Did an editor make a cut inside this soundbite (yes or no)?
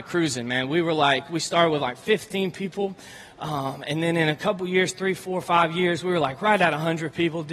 no